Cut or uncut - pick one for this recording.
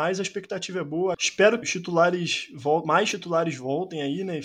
cut